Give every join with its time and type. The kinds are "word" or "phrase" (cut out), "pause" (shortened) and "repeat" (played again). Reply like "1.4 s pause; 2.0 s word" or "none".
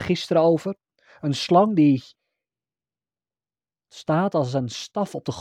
none

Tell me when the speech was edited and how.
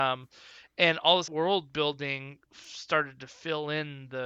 1.3 s phrase; 2.5 s pause

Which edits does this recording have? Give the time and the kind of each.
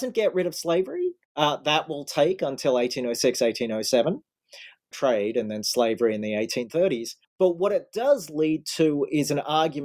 1.2 s pause; 4.9 s phrase; 7.2 s pause

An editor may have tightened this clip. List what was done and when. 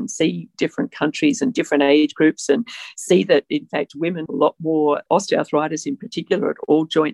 4.3 s word

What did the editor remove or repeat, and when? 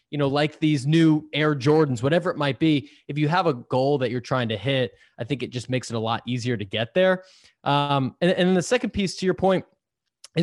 none

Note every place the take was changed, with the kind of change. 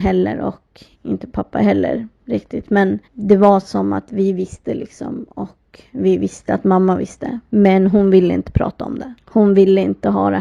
0.9 s pause; 3.0 s pause; 7.5 s pause

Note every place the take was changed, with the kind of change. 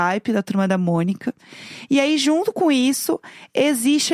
none

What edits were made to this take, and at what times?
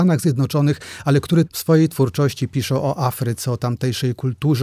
1.5 s word

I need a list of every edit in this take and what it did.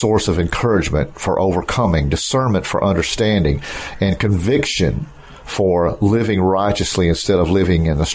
none

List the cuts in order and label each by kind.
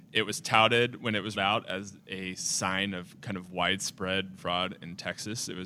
1.3 s word; 4.4 s word

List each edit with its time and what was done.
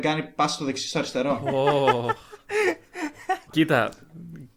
3.5 s word

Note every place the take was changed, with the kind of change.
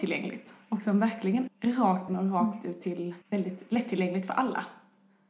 1.5 s word; 2.1 s phrase; 3.2 s pause

